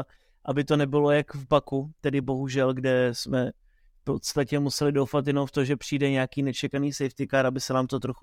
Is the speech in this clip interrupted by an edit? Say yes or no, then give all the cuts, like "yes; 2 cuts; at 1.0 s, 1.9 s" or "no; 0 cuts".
no; 0 cuts